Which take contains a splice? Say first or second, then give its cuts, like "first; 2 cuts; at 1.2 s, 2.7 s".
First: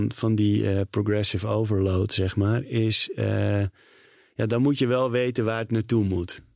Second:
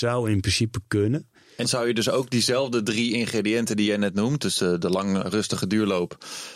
second; 2 cuts; at 1.6 s, 5.2 s